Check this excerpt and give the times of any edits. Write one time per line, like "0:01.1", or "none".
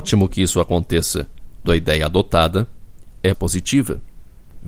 0:01.6
0:03.3